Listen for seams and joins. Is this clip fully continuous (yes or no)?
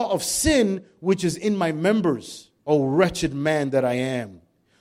no